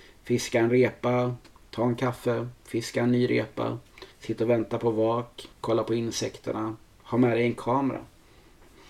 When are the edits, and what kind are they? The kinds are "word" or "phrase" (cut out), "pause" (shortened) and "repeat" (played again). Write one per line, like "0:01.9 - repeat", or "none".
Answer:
0:01.4 - pause
0:04.1 - pause
0:05.5 - pause